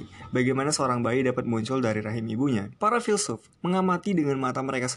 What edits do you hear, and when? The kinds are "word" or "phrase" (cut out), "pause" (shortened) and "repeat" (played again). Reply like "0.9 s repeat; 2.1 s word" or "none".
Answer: 2.8 s pause; 3.6 s pause

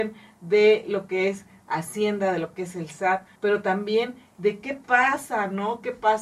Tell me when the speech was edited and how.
3.4 s pause

